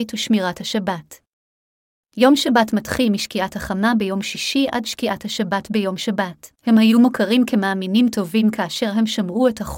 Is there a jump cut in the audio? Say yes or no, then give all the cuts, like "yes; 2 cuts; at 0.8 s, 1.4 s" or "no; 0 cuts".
yes; 1 cut; at 6.6 s